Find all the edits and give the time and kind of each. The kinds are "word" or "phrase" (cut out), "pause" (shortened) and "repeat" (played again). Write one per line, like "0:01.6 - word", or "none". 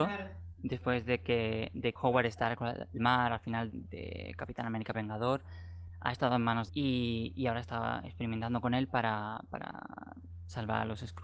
0:02.0 - word
0:03.0 - phrase
0:03.7 - word
0:04.9 - word
0:06.7 - phrase

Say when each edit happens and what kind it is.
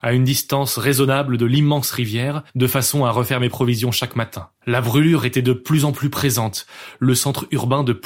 0:02.5 - pause
0:04.6 - pause

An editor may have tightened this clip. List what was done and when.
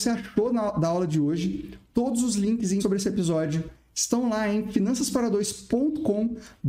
0:02.8 - phrase

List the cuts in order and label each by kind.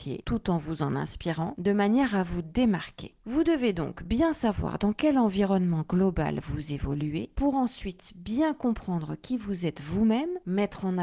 none

